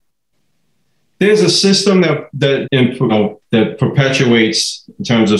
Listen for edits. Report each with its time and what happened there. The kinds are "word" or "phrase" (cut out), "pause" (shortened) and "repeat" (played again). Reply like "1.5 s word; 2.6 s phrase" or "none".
2.6 s word; 3.1 s word